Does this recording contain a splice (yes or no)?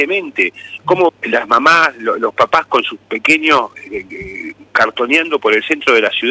yes